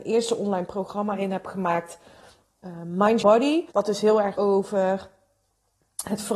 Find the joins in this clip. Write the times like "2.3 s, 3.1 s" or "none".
3.2 s, 3.7 s, 4.3 s